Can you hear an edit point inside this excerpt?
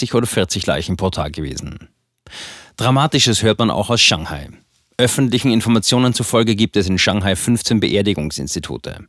no; 0 cuts

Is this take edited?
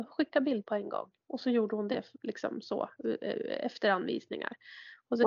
no; 0 cuts

